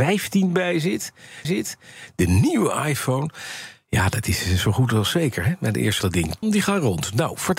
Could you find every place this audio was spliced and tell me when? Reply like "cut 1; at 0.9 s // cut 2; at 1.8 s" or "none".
cut 1; at 1.4 s // cut 2; at 6.0 s // cut 3; at 6.4 s